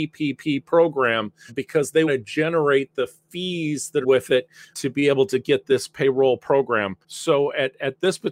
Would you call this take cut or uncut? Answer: cut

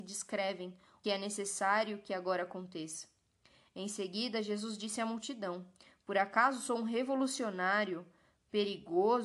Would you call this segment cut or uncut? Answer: cut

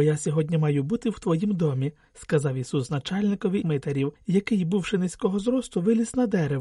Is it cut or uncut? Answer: cut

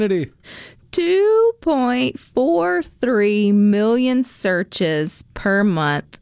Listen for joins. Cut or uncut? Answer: uncut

